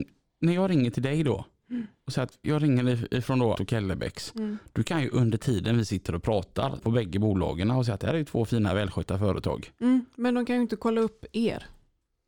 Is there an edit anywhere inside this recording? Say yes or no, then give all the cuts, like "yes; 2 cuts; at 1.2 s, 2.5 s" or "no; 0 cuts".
yes; 3 cuts; at 2.4 s, 3.5 s, 6.8 s